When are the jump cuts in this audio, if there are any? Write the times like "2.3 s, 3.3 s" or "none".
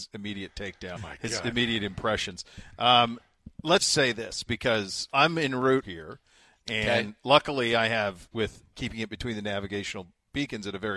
1.0 s, 3.8 s, 5.1 s, 5.8 s, 8.3 s, 8.7 s